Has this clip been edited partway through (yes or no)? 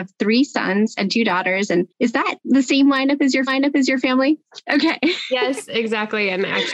yes